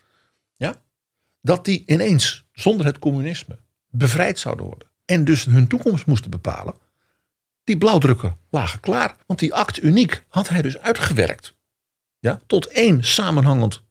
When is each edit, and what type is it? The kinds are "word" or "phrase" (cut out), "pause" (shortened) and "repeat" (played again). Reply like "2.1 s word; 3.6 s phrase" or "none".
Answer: 4.9 s pause; 9.2 s pause